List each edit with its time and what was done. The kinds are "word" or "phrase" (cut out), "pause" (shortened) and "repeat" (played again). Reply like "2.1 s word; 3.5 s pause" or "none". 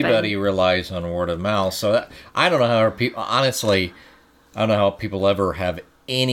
none

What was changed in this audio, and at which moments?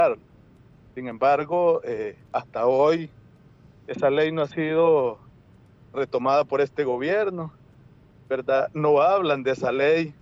2.2 s pause

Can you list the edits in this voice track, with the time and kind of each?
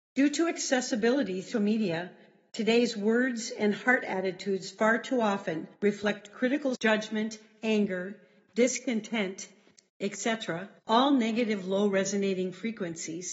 1.5 s word; 5.8 s pause; 6.7 s word; 10.8 s pause

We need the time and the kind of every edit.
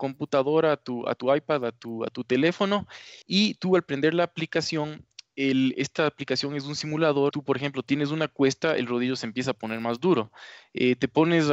3.2 s pause; 7.3 s word

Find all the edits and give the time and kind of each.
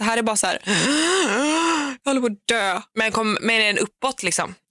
none

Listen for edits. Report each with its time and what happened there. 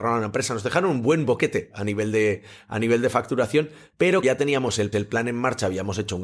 4.2 s word; 4.9 s repeat

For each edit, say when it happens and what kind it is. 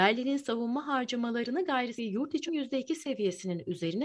2.0 s word; 2.5 s word

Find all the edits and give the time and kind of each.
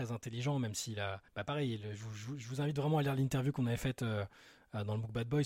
1.3 s pause

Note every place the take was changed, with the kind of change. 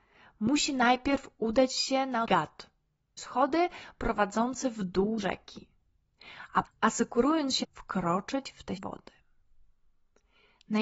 2.3 s word; 3.2 s word; 5.2 s word; 6.6 s word; 7.6 s word; 8.8 s word

